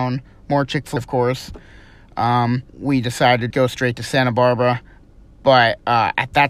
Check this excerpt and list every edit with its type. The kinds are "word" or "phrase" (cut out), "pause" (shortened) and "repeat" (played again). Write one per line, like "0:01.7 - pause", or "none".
0:01.0 - word
0:02.7 - pause
0:03.5 - word